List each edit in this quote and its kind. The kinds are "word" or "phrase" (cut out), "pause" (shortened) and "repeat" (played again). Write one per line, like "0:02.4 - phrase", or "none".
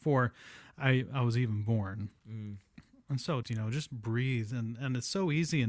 0:03.4 - phrase